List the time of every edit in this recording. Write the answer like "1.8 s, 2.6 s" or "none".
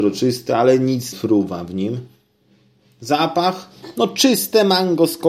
1.1 s